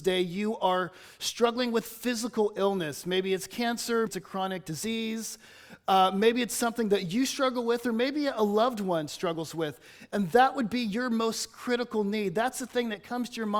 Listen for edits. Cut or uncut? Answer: cut